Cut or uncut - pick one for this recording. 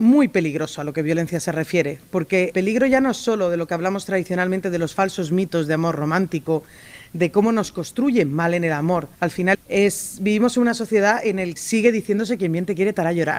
cut